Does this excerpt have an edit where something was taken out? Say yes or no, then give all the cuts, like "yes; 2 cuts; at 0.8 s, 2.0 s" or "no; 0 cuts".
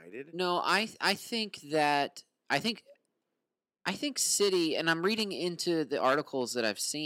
no; 0 cuts